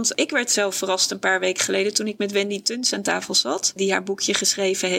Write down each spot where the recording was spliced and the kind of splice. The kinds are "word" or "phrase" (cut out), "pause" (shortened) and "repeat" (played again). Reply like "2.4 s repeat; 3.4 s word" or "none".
none